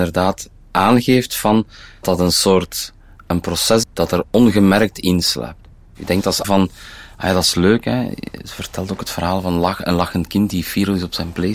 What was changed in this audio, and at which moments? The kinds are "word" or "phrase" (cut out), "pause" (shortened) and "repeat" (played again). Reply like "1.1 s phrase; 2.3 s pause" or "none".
2.0 s word; 3.8 s word; 6.4 s word